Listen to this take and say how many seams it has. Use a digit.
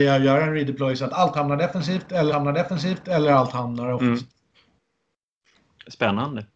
1